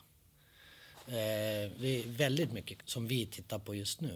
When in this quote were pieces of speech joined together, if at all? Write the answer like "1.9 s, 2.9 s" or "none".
1.8 s, 2.8 s

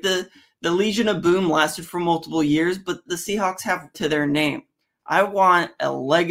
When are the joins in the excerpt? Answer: 3.1 s, 3.9 s

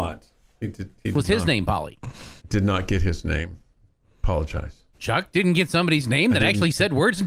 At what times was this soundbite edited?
2.4 s, 4.9 s

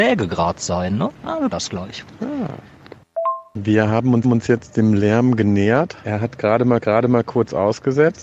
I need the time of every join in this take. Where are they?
1.1 s, 1.5 s, 3.5 s, 4.2 s, 6.8 s

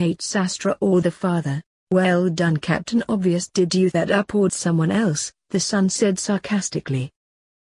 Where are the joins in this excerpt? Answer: 1.0 s, 1.8 s, 3.9 s, 4.5 s

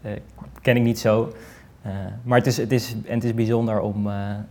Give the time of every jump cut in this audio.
none

